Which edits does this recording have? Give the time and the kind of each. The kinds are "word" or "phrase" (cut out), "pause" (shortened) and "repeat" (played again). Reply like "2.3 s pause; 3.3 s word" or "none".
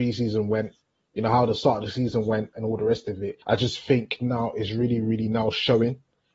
3.4 s pause